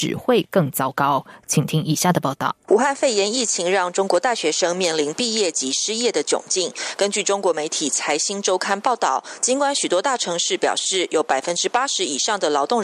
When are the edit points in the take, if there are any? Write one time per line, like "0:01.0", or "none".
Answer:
0:02.6